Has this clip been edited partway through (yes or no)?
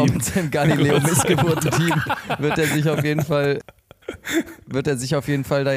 no